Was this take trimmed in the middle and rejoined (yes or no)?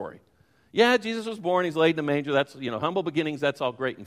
no